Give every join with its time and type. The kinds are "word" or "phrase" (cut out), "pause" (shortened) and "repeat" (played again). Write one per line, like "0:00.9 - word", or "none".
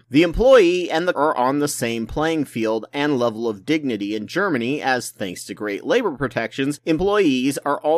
0:01.1 - word

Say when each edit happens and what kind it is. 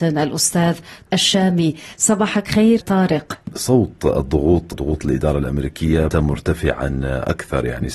0:01.1 - word
0:02.8 - word
0:04.7 - word
0:06.1 - word

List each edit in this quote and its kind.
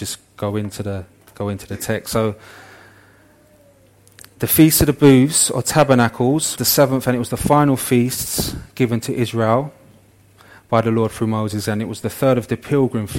0:06.5 - word

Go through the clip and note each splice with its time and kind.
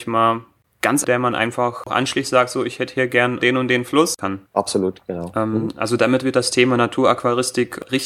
0:01.0 - phrase
0:03.4 - phrase
0:04.5 - pause

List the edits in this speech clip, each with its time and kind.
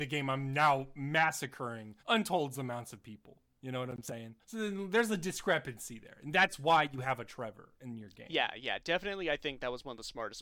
0:02.0 - pause
0:04.4 - pause

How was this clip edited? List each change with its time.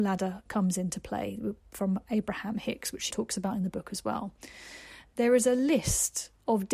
0:03.1 - word

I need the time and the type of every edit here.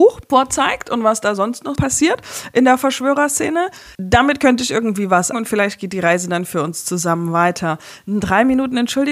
0:01.7 - word
0:03.9 - pause
0:05.3 - word

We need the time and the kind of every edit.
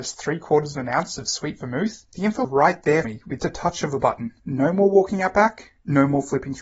0:02.1 - pause
0:02.4 - word
0:03.0 - word
0:03.4 - word
0:04.4 - pause

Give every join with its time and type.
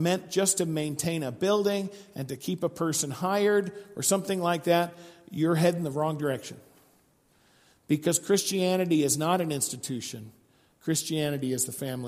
none

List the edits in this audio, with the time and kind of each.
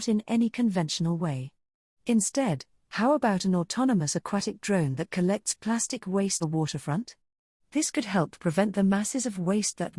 0:06.4 - phrase

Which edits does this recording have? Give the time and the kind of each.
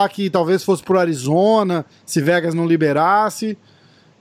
none

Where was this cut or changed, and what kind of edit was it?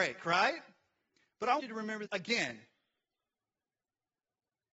0:01.6 - word
0:02.1 - word

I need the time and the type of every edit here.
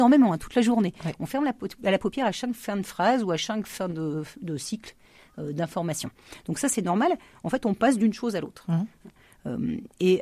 none

